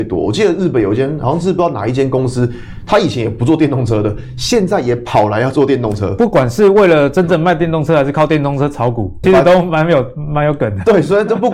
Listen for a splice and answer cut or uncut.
cut